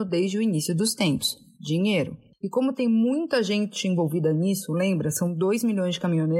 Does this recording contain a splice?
no; 0 cuts

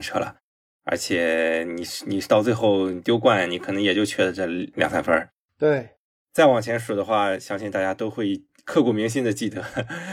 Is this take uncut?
yes; 0 cuts

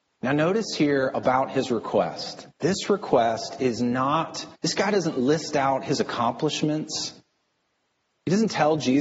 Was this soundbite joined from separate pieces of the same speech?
yes; 2 cuts; at 2.5 s, 4.6 s

